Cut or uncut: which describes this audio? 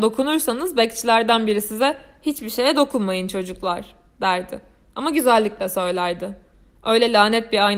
uncut